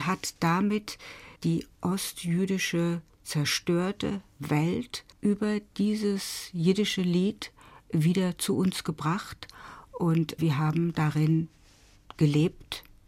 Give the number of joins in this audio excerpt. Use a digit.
3